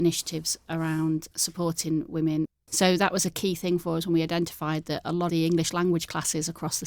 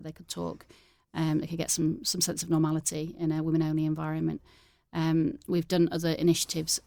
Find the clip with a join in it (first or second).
first